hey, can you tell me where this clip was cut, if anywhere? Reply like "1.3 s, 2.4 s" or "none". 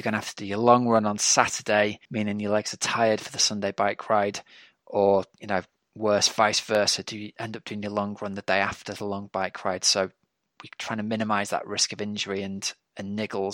2.0 s